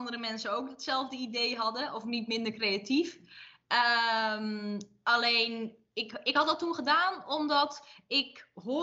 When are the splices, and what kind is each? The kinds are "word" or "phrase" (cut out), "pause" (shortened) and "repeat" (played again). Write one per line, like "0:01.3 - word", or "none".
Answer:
none